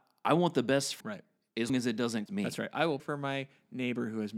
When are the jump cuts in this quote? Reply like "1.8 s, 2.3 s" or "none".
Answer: 1.0 s, 1.7 s, 2.3 s, 3.0 s